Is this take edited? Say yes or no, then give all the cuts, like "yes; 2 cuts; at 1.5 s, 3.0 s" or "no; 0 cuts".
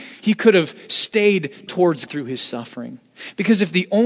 yes; 2 cuts; at 1.7 s, 2.1 s